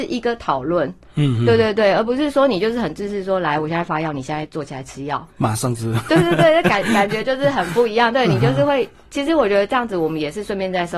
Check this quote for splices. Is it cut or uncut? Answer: cut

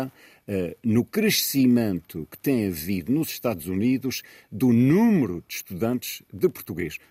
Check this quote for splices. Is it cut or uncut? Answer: uncut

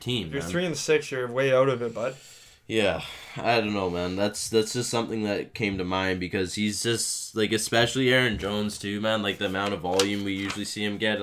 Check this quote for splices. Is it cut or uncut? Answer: uncut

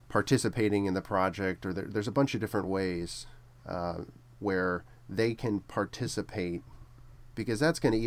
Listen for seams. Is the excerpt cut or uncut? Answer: uncut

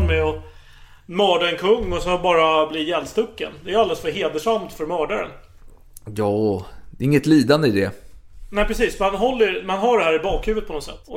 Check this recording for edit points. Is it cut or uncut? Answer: uncut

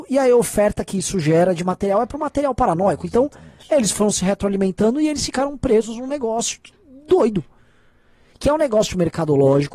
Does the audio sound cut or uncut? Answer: uncut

